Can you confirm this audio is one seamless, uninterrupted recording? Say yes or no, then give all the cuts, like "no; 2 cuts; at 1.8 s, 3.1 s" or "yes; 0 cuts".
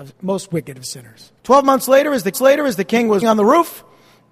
no; 3 cuts; at 1.4 s, 2.3 s, 3.2 s